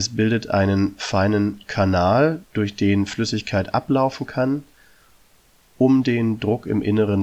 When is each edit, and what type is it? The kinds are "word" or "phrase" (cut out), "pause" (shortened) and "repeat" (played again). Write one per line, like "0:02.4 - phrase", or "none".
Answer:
0:02.4 - pause